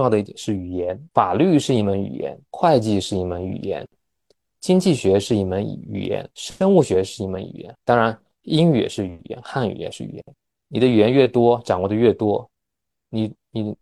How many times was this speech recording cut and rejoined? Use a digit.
4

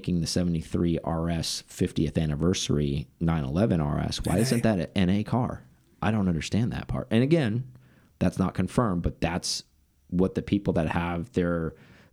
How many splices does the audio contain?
0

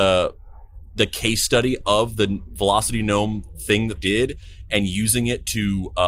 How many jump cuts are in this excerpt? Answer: 1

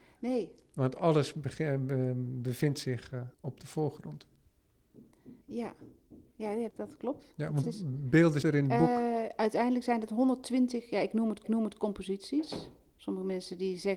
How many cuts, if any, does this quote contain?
6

